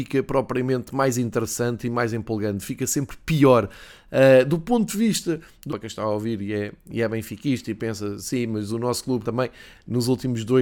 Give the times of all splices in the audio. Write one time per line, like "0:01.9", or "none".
0:05.7
0:09.2